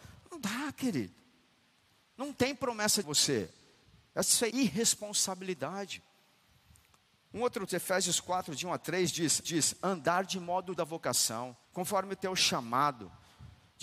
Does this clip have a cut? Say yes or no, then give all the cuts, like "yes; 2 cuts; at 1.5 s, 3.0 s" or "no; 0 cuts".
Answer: yes; 6 cuts; at 3.0 s, 4.5 s, 7.7 s, 9.4 s, 10.8 s, 11.6 s